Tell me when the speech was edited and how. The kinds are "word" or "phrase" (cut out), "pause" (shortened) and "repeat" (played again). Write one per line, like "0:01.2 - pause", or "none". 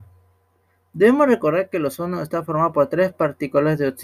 none